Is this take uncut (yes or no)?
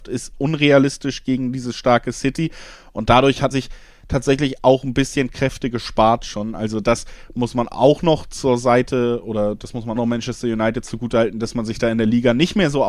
no